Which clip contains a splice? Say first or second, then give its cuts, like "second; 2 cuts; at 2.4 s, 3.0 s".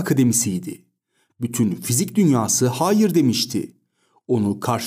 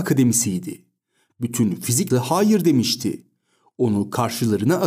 second; 1 cut; at 2.1 s